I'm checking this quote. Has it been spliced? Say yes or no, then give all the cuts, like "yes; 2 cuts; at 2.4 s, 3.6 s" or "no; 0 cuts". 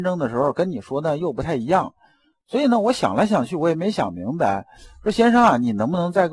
no; 0 cuts